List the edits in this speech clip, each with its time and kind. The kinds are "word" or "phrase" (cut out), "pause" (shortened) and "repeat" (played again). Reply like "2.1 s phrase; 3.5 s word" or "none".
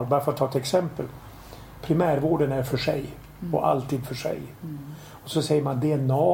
none